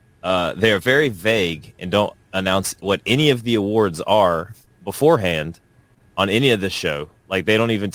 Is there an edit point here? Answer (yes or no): no